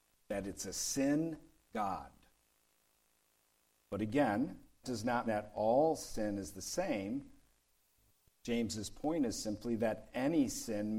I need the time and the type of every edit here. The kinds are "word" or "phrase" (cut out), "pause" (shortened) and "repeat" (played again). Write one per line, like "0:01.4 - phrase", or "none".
0:01.7 - word
0:04.8 - word
0:05.3 - word